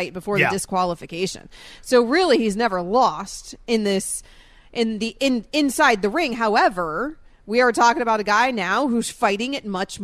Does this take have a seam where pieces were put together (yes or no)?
no